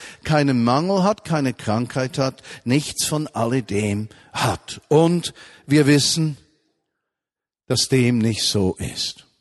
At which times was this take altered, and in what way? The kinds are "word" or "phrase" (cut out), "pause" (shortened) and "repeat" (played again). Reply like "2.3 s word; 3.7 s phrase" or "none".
none